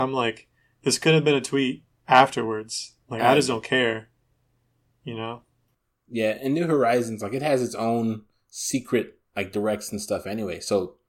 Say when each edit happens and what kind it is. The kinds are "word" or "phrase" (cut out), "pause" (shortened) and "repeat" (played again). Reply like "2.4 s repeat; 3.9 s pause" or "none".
none